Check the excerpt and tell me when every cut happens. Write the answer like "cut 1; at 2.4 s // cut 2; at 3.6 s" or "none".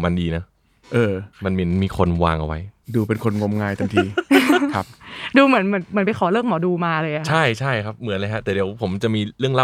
cut 1; at 1.3 s